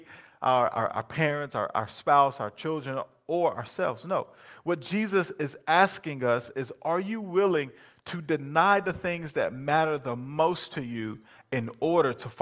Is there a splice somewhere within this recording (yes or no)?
no